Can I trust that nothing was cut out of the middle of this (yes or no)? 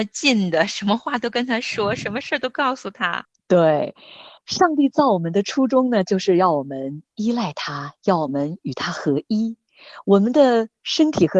no